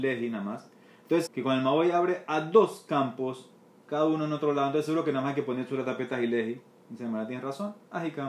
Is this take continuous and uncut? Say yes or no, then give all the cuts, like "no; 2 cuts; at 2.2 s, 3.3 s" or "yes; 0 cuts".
no; 1 cut; at 1.3 s